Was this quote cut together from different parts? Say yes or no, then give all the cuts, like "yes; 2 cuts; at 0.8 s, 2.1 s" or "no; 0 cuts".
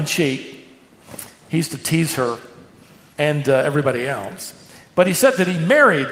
no; 0 cuts